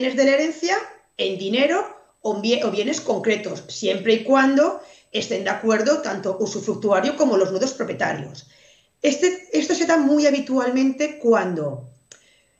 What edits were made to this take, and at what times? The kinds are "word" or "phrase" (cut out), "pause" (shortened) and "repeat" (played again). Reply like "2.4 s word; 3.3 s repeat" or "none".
none